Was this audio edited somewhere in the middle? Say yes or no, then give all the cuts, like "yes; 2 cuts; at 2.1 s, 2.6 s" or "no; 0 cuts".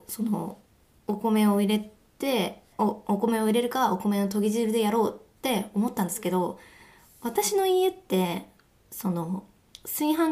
yes; 2 cuts; at 2.7 s, 5.3 s